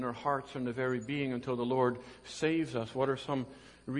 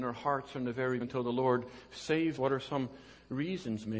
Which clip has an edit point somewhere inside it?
second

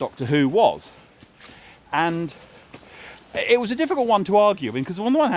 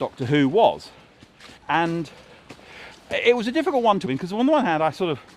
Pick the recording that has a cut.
second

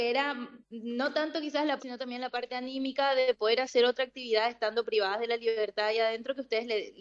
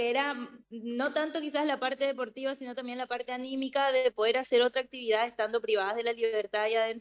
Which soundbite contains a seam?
first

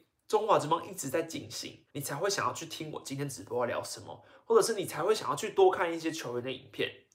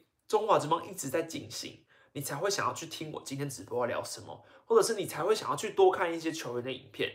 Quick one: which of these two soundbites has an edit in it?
first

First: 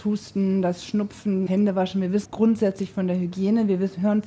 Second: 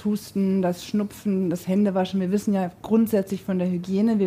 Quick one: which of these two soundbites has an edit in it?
first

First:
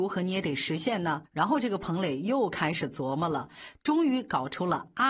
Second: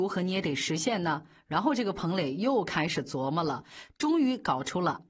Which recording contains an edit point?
first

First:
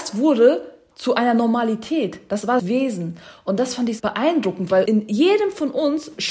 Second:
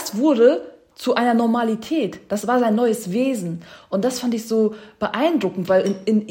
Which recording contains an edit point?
first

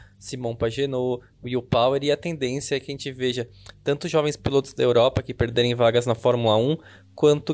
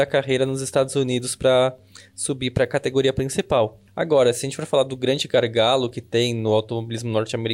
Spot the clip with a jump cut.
second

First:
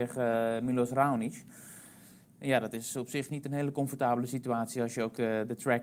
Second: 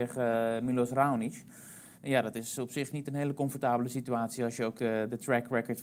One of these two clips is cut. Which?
second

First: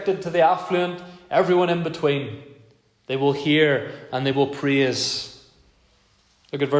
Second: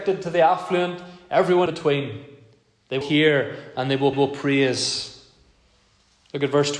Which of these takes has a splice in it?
second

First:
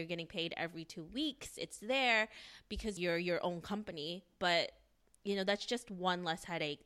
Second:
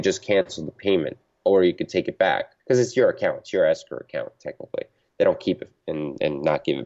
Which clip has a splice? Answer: second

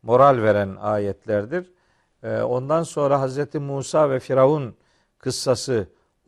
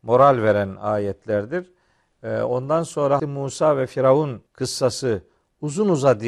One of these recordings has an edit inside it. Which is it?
second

